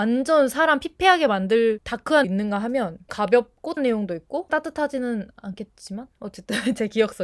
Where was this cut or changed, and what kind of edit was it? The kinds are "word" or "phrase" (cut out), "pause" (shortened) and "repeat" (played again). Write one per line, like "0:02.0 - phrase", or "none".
0:01.8 - word
0:02.2 - word
0:03.1 - word
0:03.8 - word
0:04.5 - word